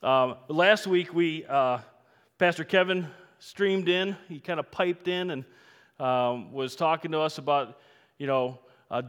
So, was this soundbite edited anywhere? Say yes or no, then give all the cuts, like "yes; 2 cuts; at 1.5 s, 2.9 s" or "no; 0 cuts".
no; 0 cuts